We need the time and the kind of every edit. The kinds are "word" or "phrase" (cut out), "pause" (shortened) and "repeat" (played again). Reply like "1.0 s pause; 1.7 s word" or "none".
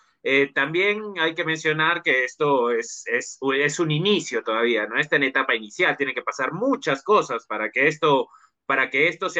none